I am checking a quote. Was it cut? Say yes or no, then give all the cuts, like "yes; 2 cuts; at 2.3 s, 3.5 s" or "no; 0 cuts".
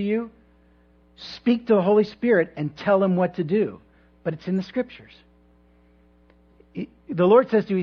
no; 0 cuts